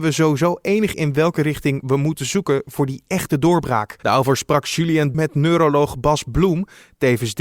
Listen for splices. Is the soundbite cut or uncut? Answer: cut